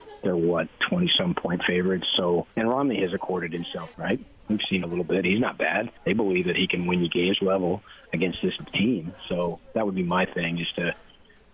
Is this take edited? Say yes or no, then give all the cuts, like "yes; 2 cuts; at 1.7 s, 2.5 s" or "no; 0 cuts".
yes; 6 cuts; at 2.5 s, 3.9 s, 4.8 s, 6.0 s, 7.4 s, 8.6 s